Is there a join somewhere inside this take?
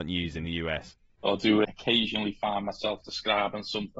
yes; 1 cut; at 1.6 s

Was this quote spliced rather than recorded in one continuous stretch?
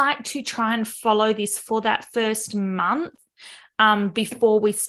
no; 0 cuts

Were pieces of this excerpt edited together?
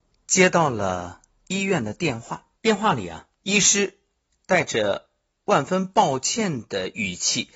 yes; 2 cuts; at 2.6 s, 3.3 s

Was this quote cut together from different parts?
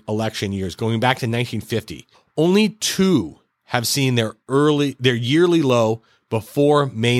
yes; 1 cut; at 2.1 s

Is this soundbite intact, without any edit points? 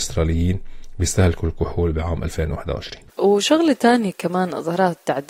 yes; 0 cuts

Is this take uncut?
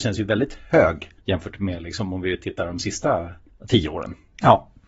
no; 2 cuts; at 1.2 s, 3.5 s

